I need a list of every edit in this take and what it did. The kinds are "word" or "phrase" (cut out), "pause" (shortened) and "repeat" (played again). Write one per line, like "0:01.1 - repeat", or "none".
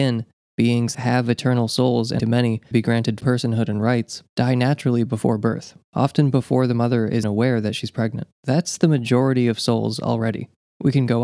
0:00.9 - word
0:02.2 - word
0:02.7 - word
0:03.2 - word
0:07.2 - word
0:08.3 - pause